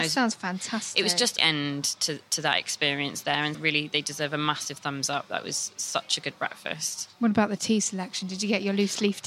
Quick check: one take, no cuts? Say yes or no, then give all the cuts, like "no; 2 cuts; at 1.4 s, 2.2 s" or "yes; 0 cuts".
no; 3 cuts; at 1.4 s, 3.5 s, 7.1 s